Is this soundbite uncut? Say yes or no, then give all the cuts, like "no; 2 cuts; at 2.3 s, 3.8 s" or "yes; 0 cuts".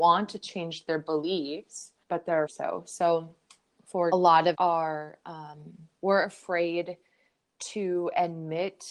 no; 5 cuts; at 2.0 s, 2.5 s, 4.1 s, 4.5 s, 6.0 s